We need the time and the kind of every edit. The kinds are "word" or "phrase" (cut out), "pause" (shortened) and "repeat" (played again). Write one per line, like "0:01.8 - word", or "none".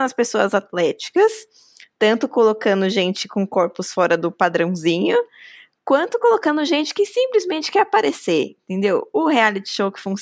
none